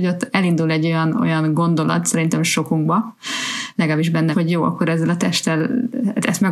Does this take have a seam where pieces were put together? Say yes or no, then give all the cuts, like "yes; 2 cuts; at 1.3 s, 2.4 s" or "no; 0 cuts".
yes; 1 cut; at 4.3 s